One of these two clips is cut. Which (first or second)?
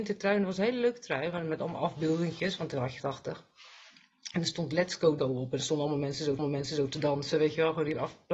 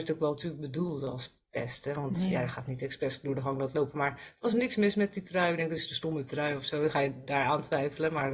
first